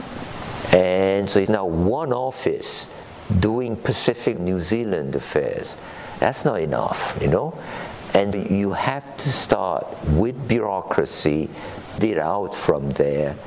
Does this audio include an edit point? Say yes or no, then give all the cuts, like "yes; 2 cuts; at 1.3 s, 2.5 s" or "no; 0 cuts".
yes; 4 cuts; at 1.5 s, 4.4 s, 8.3 s, 12.0 s